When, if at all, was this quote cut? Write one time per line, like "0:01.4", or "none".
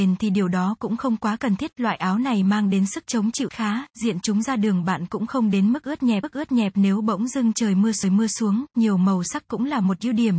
0:03.5
0:06.2
0:08.0